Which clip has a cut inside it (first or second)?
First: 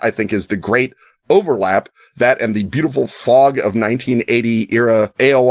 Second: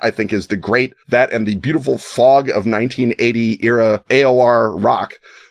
second